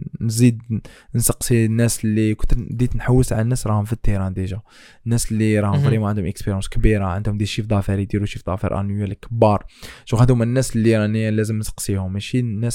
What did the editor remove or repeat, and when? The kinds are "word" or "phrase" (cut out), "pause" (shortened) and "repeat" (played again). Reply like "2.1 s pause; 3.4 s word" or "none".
none